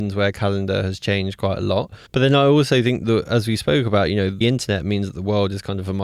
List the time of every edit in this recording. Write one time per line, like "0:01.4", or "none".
0:02.1
0:04.4